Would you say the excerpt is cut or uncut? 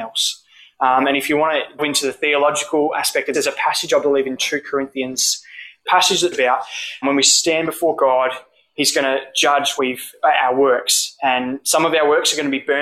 cut